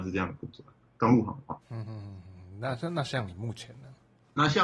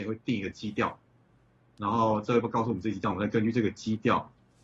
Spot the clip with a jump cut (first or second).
first